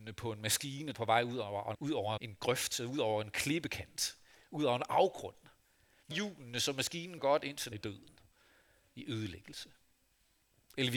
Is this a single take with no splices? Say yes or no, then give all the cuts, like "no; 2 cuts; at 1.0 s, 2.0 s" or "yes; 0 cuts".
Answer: no; 6 cuts; at 0.9 s, 1.7 s, 2.2 s, 6.1 s, 7.2 s, 7.7 s